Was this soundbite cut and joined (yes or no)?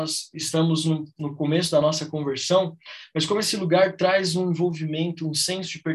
no